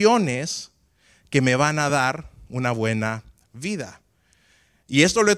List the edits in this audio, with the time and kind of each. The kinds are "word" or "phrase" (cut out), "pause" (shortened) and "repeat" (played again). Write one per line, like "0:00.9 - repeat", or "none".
none

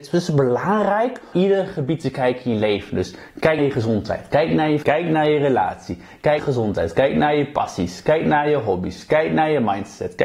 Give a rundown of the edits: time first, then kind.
0:01.3 - phrase
0:03.6 - word
0:04.8 - phrase
0:06.4 - phrase

